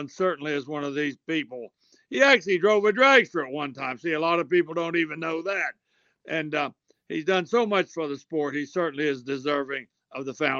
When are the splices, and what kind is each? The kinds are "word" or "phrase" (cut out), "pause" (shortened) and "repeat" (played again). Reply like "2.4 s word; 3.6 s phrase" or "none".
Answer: none